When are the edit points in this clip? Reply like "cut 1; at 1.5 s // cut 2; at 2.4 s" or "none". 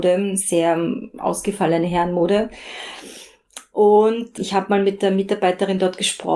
cut 1; at 4.4 s